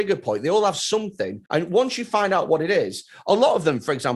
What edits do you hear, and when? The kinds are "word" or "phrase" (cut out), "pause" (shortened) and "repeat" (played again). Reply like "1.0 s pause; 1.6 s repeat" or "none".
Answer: 1.5 s pause